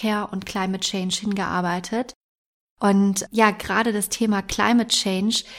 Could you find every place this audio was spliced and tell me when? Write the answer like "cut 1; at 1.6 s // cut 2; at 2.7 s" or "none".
none